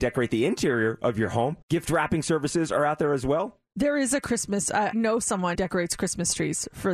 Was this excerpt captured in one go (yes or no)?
no